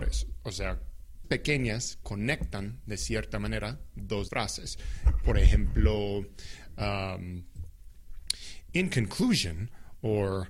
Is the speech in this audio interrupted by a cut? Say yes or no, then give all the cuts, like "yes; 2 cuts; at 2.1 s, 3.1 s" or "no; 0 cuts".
yes; 3 cuts; at 1.2 s, 2.0 s, 4.3 s